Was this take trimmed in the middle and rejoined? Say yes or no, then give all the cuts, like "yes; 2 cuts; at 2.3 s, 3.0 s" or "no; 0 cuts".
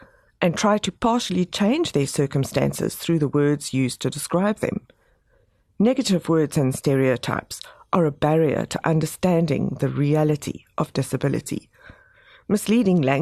no; 0 cuts